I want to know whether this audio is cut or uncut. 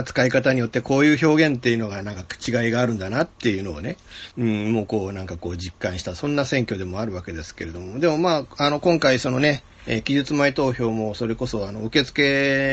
cut